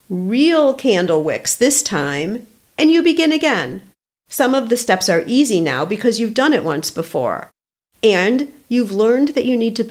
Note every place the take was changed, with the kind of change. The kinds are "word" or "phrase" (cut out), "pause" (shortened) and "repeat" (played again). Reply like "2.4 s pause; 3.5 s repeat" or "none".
4.1 s pause